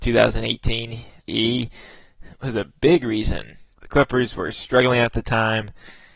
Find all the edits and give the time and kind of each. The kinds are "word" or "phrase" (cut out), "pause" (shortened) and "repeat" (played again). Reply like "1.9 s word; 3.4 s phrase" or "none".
1.2 s pause; 3.7 s pause